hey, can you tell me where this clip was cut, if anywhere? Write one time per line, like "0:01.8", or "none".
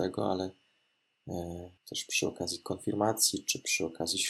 0:01.8